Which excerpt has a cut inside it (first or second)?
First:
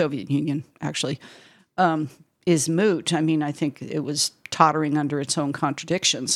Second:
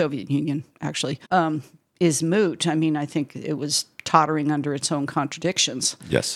second